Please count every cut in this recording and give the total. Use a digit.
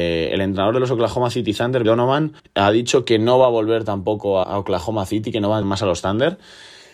4